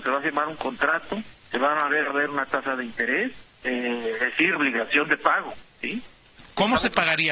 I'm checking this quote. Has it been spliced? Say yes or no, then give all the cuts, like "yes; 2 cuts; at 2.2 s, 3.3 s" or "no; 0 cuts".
yes; 3 cuts; at 2.1 s, 3.5 s, 4.6 s